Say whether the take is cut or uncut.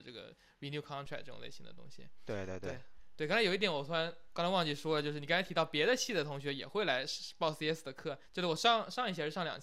cut